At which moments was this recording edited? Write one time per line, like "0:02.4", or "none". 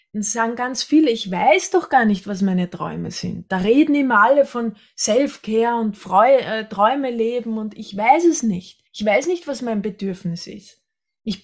0:08.9